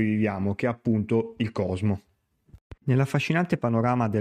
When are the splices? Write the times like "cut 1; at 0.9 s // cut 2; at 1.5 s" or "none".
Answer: cut 1; at 2.8 s

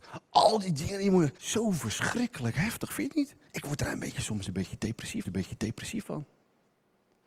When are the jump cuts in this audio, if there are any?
cut 1; at 1.3 s // cut 2; at 3.5 s // cut 3; at 5.2 s

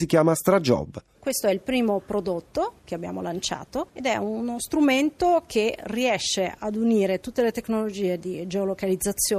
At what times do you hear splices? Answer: cut 1; at 3.9 s

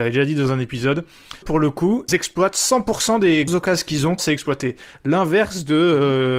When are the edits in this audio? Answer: cut 1; at 1.4 s // cut 2; at 2.1 s // cut 3; at 3.5 s // cut 4; at 4.2 s

